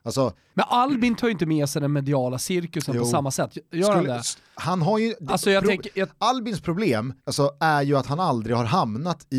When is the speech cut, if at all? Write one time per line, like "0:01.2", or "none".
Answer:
0:07.2